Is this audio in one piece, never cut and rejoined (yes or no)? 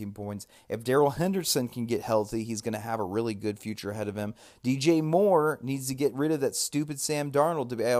yes